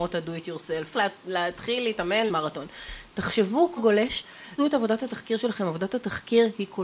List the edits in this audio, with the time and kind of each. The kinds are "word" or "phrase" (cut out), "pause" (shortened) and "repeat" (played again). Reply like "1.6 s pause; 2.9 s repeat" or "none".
0.9 s word; 2.3 s word; 3.8 s word; 4.6 s word